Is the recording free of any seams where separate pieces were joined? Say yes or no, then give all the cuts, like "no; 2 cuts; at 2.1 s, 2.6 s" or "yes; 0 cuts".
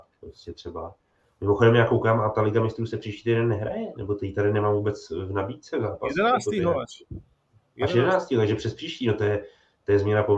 yes; 0 cuts